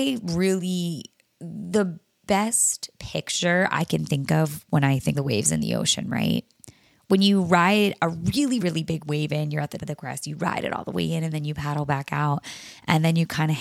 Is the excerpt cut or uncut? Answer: cut